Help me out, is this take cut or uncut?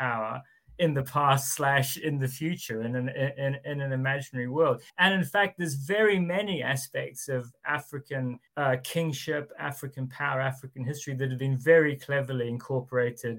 cut